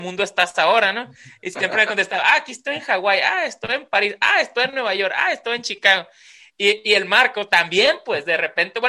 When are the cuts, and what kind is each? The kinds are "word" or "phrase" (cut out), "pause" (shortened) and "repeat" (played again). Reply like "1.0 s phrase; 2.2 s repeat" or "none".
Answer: none

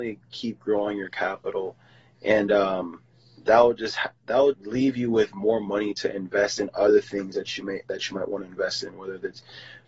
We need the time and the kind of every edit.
4.5 s word

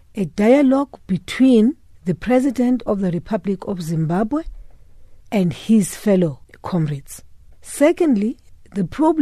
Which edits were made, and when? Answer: 1.9 s pause; 5.2 s pause; 7.4 s pause

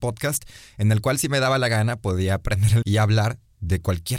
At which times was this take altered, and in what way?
2.8 s word

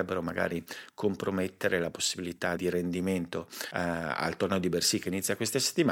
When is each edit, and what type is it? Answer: 2.6 s word

